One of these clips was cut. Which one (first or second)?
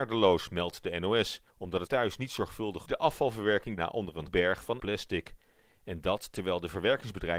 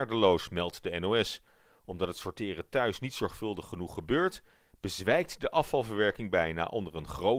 first